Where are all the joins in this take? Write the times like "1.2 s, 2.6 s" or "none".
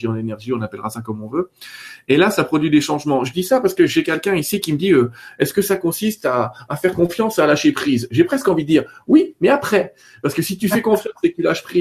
none